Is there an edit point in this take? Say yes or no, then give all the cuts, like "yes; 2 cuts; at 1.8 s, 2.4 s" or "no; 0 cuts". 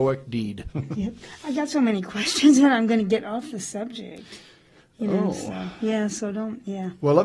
no; 0 cuts